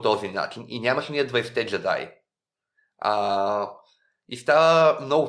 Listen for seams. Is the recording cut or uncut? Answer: uncut